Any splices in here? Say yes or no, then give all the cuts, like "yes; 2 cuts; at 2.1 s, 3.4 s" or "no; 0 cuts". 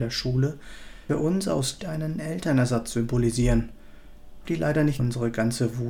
yes; 4 cuts; at 1.1 s, 1.8 s, 4.5 s, 5.0 s